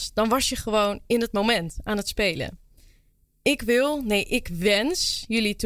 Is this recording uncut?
yes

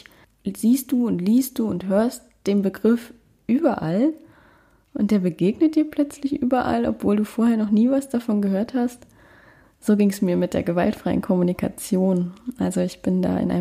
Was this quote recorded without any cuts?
yes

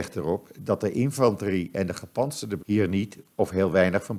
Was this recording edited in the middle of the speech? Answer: yes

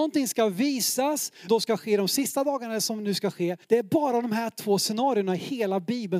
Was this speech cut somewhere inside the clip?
yes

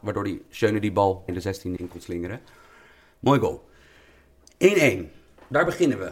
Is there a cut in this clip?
yes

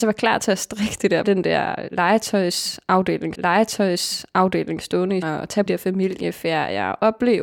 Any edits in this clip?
yes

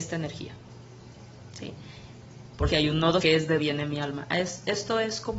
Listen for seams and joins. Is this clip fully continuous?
no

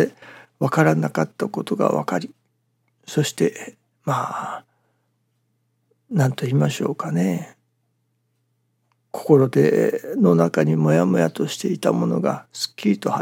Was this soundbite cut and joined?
no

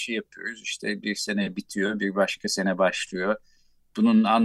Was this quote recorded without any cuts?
yes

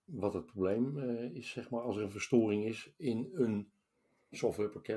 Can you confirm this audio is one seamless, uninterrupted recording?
yes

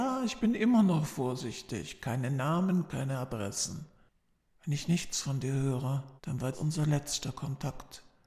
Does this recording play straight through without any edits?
no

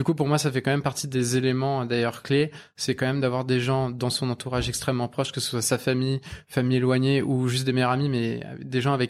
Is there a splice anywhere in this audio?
no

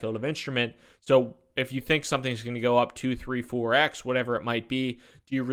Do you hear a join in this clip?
no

